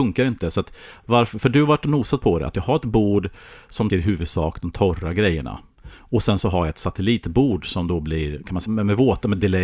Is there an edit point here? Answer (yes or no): yes